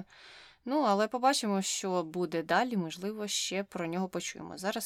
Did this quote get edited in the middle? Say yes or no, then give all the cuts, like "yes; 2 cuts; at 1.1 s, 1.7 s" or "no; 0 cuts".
no; 0 cuts